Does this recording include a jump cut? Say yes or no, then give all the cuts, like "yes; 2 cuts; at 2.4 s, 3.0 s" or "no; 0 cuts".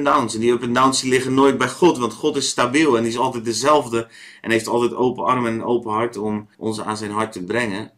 yes; 1 cut; at 6.5 s